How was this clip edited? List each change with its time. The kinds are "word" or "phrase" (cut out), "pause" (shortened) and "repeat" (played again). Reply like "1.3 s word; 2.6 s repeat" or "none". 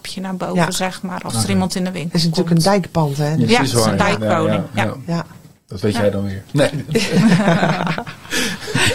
none